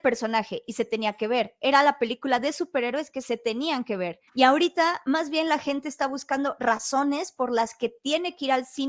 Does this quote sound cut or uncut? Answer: cut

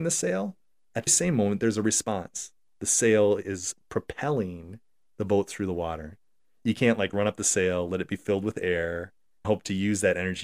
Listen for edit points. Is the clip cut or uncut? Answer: cut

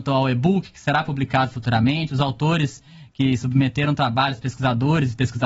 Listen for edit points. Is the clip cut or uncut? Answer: uncut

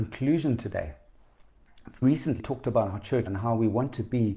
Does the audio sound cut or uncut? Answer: cut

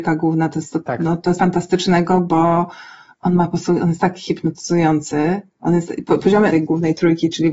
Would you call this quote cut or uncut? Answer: cut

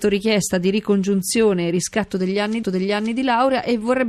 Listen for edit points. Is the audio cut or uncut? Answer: cut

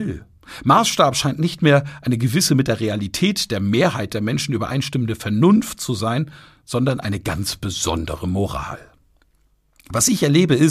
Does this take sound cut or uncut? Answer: uncut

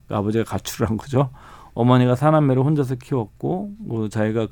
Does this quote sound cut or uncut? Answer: uncut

